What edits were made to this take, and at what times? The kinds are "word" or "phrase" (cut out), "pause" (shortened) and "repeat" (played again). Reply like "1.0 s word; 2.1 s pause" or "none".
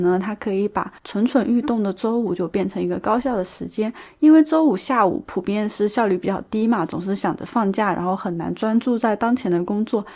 1.0 s pause